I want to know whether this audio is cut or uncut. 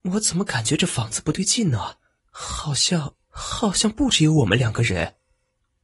cut